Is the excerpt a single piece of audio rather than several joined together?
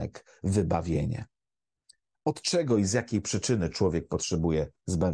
yes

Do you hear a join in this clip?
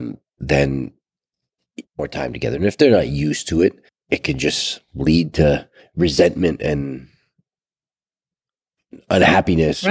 yes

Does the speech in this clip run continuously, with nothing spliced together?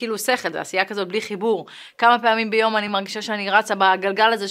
yes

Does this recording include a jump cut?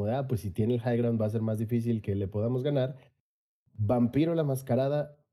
no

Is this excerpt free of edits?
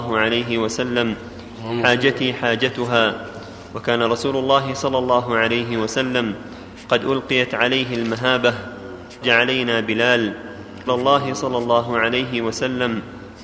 no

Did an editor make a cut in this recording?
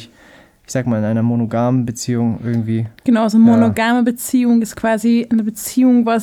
yes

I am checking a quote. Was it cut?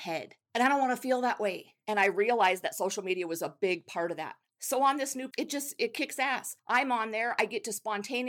yes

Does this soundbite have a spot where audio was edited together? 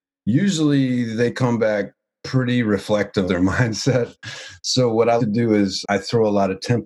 yes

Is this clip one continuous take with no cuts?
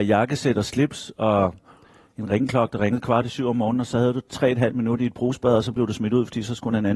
yes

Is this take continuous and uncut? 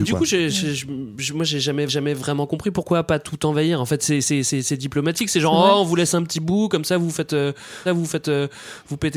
no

